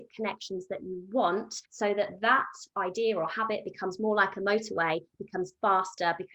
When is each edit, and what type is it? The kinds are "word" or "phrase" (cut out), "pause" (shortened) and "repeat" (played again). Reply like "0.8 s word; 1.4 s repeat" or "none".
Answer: 1.6 s pause